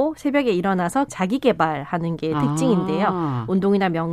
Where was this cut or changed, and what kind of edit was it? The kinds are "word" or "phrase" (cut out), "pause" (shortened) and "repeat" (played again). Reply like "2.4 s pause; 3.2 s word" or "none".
1.1 s word